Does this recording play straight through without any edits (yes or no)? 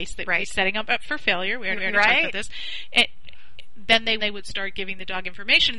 no